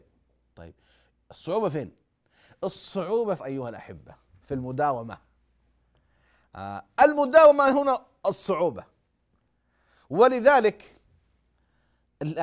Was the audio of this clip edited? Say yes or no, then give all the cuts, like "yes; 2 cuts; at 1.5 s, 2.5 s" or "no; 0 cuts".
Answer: yes; 1 cut; at 3.4 s